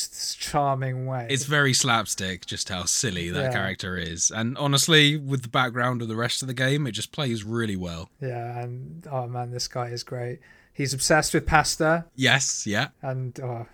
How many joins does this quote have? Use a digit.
0